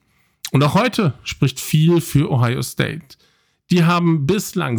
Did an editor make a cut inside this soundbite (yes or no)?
no